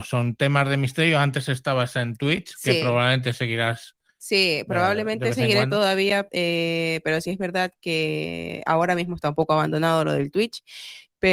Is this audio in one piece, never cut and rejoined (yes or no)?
yes